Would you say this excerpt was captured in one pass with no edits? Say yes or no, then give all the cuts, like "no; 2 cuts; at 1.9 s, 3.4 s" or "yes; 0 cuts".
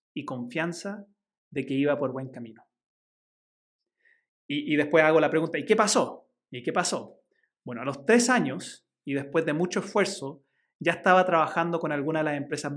yes; 0 cuts